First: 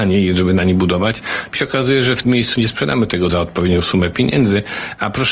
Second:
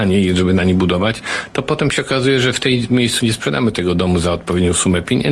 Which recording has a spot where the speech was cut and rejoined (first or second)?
first